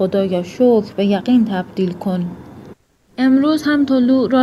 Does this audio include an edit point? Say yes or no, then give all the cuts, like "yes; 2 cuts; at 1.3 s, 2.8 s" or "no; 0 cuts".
no; 0 cuts